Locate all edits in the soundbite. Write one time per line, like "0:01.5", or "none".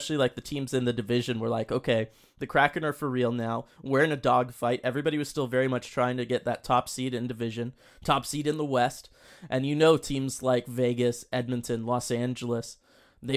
none